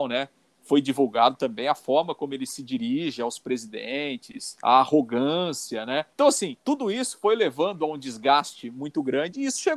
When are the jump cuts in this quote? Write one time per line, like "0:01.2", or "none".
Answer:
0:06.1
0:06.6

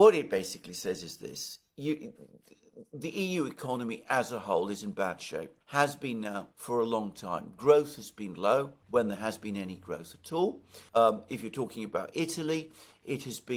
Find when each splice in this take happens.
0:05.6
0:06.5
0:08.8
0:10.9

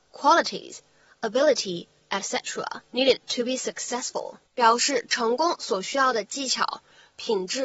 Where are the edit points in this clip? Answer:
0:04.5

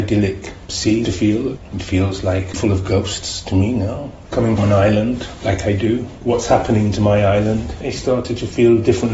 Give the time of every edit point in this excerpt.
0:01.0
0:02.5
0:04.6
0:06.2

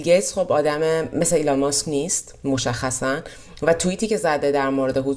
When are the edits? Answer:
none

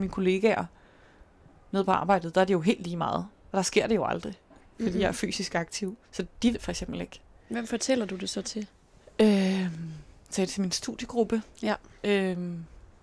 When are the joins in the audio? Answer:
0:06.0
0:06.5
0:11.5

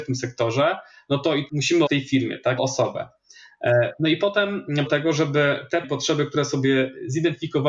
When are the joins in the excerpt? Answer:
0:01.5
0:01.9
0:02.6
0:04.9
0:05.8

